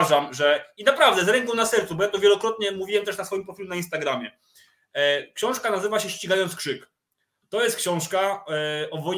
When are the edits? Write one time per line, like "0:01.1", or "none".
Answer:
none